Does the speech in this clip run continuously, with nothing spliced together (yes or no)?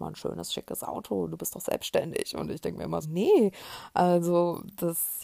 no